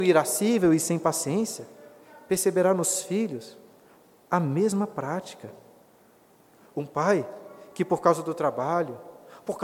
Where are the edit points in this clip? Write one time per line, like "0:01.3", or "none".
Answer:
none